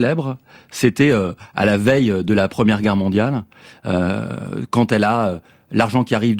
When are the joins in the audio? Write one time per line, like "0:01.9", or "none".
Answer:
none